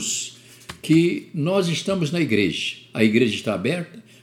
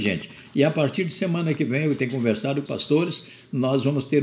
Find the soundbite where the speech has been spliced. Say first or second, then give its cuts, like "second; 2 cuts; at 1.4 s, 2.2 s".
second; 1 cut; at 2.6 s